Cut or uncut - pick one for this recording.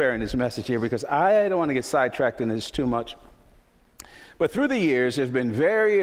uncut